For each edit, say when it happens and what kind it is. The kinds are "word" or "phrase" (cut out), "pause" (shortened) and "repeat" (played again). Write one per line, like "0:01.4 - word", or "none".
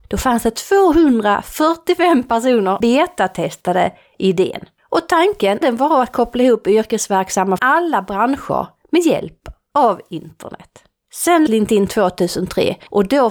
0:02.8 - word
0:05.6 - word
0:07.6 - word
0:11.5 - word